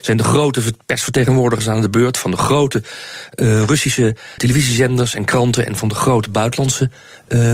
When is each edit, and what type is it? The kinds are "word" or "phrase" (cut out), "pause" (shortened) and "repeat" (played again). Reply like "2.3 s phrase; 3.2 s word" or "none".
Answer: 4.4 s word